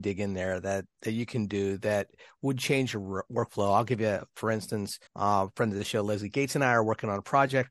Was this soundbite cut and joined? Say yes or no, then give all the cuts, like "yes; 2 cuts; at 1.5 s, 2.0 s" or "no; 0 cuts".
yes; 1 cut; at 5.1 s